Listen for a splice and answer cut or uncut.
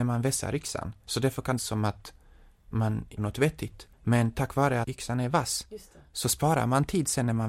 cut